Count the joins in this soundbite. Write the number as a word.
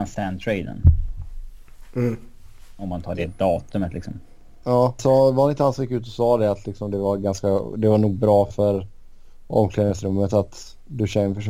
one